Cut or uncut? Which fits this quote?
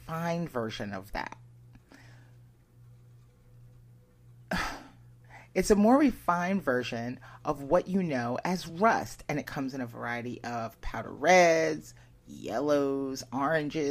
uncut